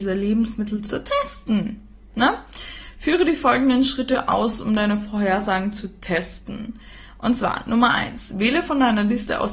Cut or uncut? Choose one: uncut